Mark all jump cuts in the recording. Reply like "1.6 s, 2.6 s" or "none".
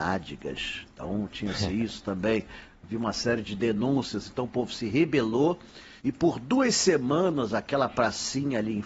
6.0 s